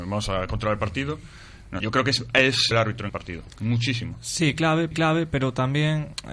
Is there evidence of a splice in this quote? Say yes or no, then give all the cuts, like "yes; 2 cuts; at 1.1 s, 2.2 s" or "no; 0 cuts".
yes; 4 cuts; at 1.8 s, 2.7 s, 3.1 s, 4.9 s